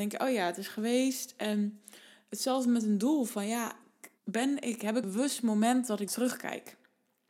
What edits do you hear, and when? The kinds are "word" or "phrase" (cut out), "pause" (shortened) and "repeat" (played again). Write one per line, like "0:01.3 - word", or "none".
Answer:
0:04.2 - pause
0:05.0 - word
0:06.1 - word